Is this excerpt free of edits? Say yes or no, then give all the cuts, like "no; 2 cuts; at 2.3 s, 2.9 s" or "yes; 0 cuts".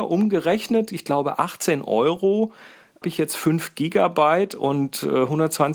no; 1 cut; at 3.0 s